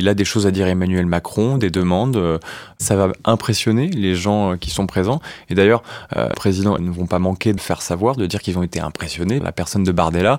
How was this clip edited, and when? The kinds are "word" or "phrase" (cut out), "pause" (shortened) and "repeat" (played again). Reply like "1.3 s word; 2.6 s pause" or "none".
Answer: 6.3 s word; 6.8 s phrase; 7.6 s word; 9.4 s word